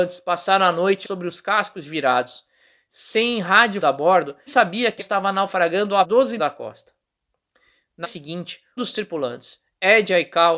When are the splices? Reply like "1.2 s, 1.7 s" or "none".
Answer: 1.0 s, 3.8 s, 4.5 s, 5.0 s, 6.0 s, 6.4 s, 8.0 s, 8.8 s